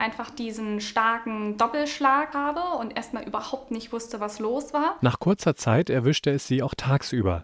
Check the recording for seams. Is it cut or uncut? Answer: cut